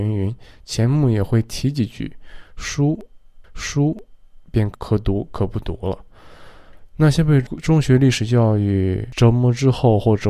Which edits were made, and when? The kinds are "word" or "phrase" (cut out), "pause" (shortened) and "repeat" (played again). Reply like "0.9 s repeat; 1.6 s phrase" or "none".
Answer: 3.4 s repeat